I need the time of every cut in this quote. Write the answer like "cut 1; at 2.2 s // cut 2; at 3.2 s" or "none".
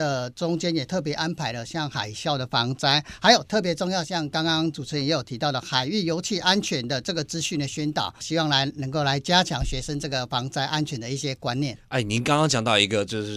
cut 1; at 8.2 s // cut 2; at 11.8 s